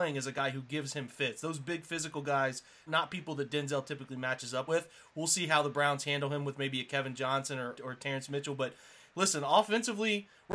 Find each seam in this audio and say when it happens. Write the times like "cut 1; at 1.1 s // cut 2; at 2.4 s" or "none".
cut 1; at 2.9 s // cut 2; at 4.7 s // cut 3; at 7.7 s